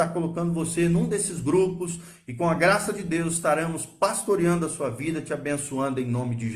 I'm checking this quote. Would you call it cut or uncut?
uncut